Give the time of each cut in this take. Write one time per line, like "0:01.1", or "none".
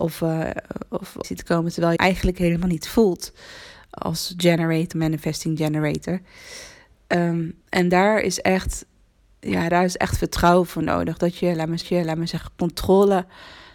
0:01.2
0:02.0
0:04.0
0:04.9
0:07.6
0:11.8

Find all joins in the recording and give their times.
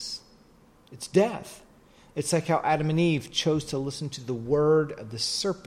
none

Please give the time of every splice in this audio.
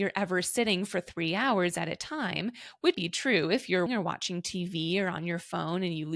0:02.9
0:03.9

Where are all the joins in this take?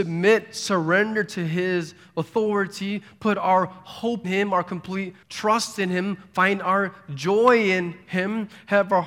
0:04.2
0:05.2

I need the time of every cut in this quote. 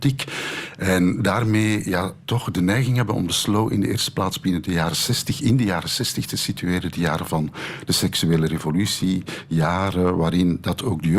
none

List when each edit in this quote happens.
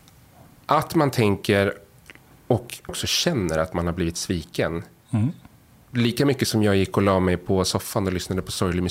0:02.9

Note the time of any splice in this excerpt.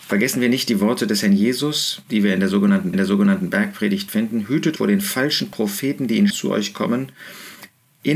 0:02.9
0:04.8
0:06.3

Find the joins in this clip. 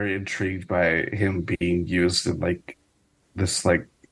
none

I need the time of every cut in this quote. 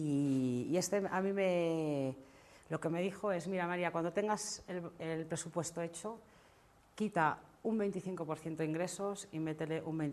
none

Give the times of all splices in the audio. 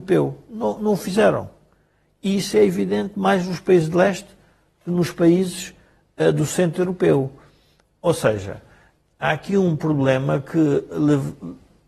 none

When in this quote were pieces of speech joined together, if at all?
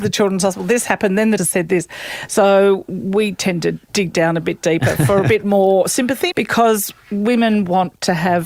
0:01.4
0:03.9
0:06.3

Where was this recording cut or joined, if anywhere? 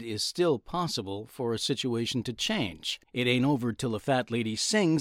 0:03.0

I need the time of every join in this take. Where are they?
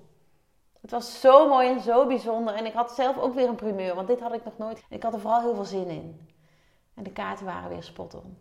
0:04.8

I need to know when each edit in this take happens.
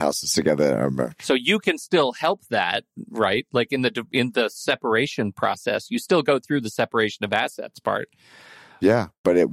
none

